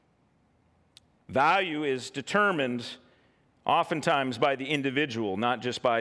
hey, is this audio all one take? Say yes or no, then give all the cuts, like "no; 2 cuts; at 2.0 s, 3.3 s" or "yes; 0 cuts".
yes; 0 cuts